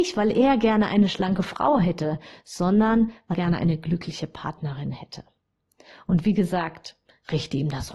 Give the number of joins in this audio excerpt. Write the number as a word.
one